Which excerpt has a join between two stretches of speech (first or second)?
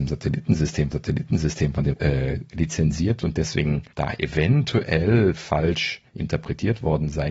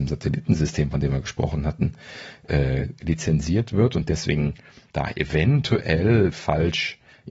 first